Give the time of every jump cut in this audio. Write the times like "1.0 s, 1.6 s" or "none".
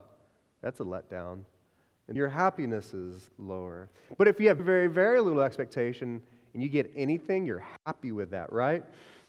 2.2 s, 4.6 s